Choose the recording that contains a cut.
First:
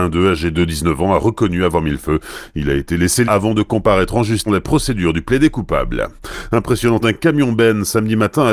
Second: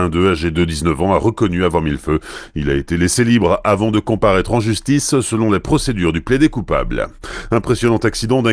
first; 3 cuts; at 3.2 s, 4.5 s, 7.0 s

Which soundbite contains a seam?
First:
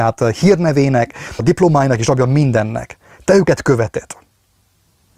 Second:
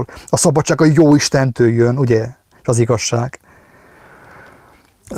first; 1 cut; at 1.4 s

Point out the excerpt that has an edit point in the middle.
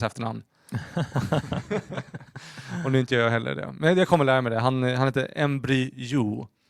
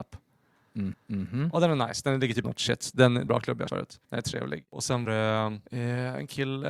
second; 7 cuts; at 0.9 s, 2.4 s, 3.3 s, 3.7 s, 4.0 s, 5.0 s, 5.7 s

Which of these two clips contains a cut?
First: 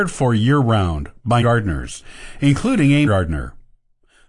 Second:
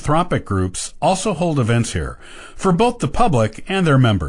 first; 2 cuts; at 1.4 s, 3.1 s

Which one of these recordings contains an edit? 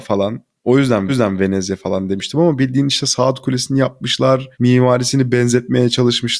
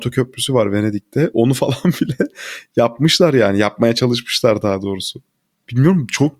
first; 2 cuts; at 1.1 s, 4.5 s

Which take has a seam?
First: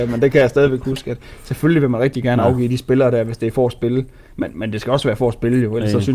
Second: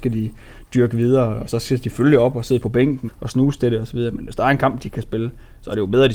second; 1 cut; at 3.1 s

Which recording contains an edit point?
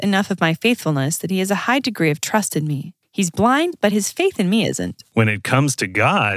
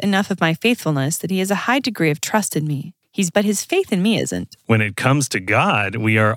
second; 1 cut; at 3.3 s

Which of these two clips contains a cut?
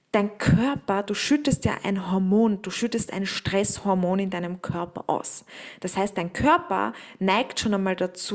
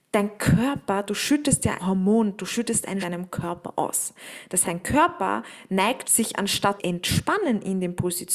second; 5 cuts; at 1.8 s, 3.0 s, 4.6 s, 6.0 s, 6.8 s

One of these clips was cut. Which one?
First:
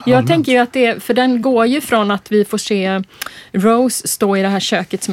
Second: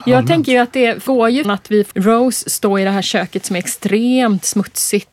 second; 3 cuts; at 1.1 s, 1.4 s, 1.9 s

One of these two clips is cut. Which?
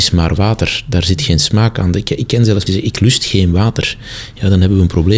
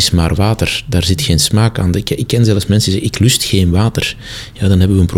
first; 1 cut; at 2.7 s

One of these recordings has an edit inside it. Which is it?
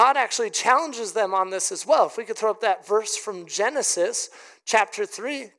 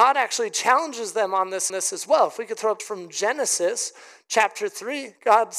second; 2 cuts; at 1.7 s, 2.8 s

